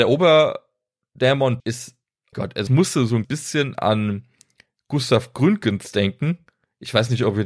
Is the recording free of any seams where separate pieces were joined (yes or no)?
no